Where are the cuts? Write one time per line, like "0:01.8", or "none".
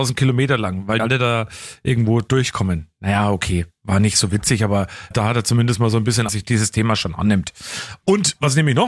0:01.0
0:05.1
0:06.3